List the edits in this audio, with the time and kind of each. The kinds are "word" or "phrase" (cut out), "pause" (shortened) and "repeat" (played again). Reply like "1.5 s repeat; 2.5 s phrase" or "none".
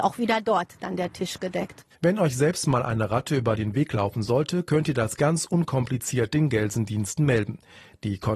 1.9 s pause